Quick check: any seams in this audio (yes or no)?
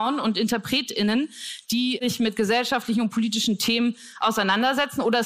no